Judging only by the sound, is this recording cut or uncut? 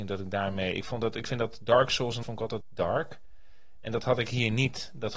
cut